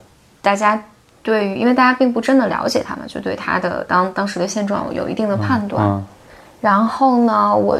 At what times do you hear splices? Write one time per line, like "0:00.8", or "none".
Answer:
none